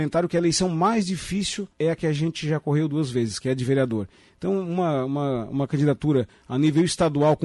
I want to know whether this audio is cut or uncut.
cut